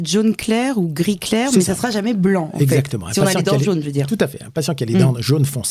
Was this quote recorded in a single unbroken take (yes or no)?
yes